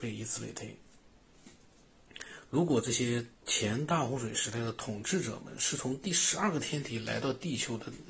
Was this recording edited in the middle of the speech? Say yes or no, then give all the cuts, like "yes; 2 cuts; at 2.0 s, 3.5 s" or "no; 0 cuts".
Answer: yes; 1 cut; at 3.3 s